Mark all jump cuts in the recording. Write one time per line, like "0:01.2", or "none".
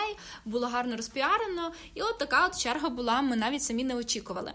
none